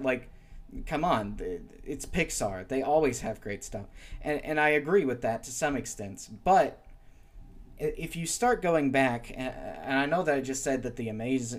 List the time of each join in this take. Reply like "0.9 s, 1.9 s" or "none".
none